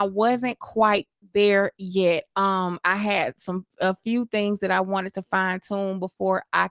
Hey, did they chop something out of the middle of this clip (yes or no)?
no